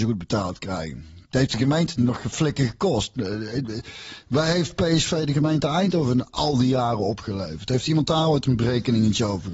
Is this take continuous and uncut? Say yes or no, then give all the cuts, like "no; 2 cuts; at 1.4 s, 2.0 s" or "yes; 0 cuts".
yes; 0 cuts